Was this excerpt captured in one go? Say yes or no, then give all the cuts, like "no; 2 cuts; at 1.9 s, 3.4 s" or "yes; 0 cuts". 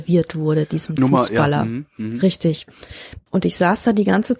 no; 2 cuts; at 1.0 s, 3.3 s